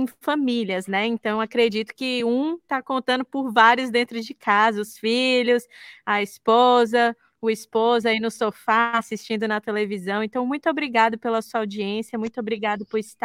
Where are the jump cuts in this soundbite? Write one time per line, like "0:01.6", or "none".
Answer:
none